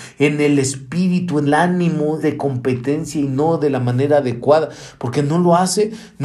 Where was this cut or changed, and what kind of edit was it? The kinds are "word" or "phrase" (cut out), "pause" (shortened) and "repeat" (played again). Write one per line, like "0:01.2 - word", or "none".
0:01.5 - word
0:02.2 - word